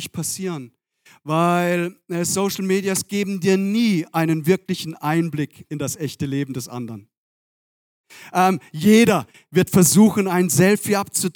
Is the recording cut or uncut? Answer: uncut